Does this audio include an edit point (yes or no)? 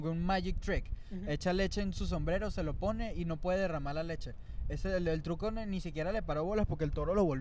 no